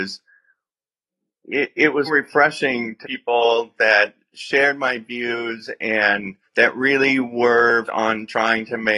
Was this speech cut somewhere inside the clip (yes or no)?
yes